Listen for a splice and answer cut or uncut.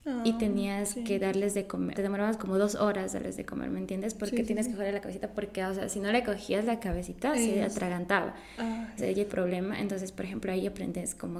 cut